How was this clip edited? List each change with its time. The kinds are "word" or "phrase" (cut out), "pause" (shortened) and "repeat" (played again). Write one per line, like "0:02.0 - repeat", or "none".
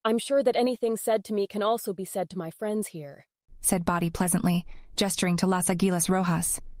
none